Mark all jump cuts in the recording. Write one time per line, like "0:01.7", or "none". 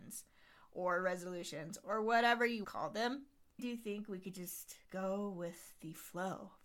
0:02.6
0:03.6
0:04.8